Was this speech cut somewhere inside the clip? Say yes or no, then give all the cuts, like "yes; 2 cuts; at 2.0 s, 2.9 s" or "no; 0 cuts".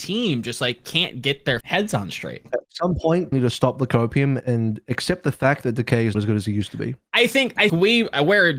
yes; 6 cuts; at 1.6 s, 2.7 s, 3.3 s, 4.4 s, 6.1 s, 7.7 s